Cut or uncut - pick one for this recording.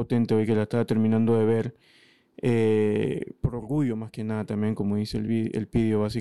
uncut